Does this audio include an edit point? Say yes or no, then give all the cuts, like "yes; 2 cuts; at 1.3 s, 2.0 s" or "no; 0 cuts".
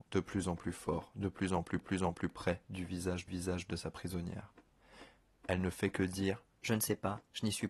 yes; 2 cuts; at 1.8 s, 3.3 s